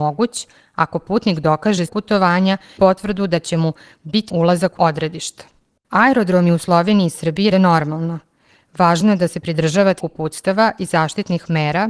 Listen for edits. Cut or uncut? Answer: cut